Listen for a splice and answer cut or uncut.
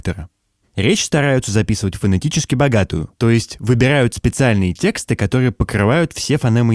cut